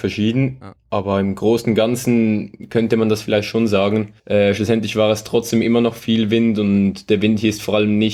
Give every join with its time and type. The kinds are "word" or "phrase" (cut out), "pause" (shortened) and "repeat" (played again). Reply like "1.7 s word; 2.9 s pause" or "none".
4.2 s pause

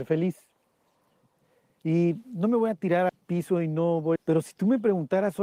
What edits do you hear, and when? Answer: 3.1 s word; 4.2 s phrase

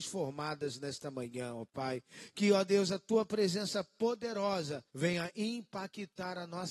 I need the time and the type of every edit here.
4.9 s pause

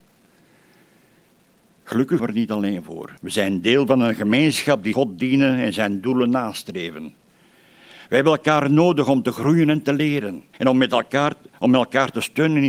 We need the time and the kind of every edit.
2.2 s word; 3.2 s pause; 4.9 s word; 10.5 s pause

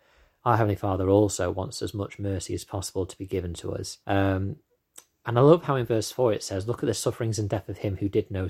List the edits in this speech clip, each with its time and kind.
4.0 s pause

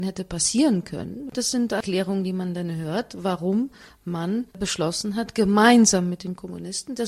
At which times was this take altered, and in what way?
4.5 s pause

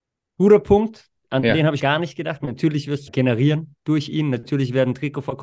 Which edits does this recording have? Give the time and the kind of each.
1.8 s word; 3.1 s phrase

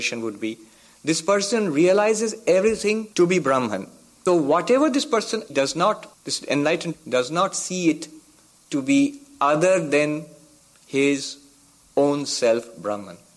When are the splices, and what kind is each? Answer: 3.1 s pause; 4.3 s word; 5.5 s phrase; 6.1 s pause; 6.9 s word

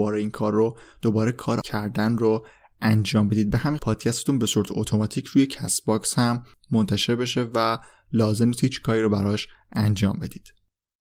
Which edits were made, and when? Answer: 1.6 s word; 3.8 s phrase

